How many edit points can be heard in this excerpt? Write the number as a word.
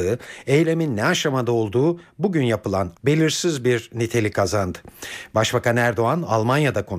one